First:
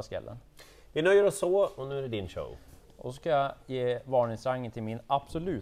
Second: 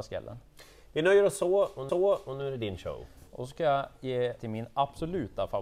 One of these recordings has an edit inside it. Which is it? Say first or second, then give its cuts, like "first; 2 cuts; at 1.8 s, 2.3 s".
second; 3 cuts; at 1.9 s, 3.3 s, 4.4 s